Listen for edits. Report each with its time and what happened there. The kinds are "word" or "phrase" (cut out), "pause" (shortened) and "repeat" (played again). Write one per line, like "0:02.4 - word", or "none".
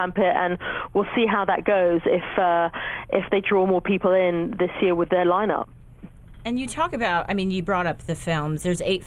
none